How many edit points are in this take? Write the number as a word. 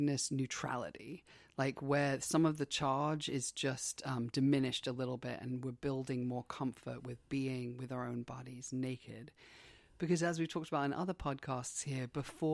zero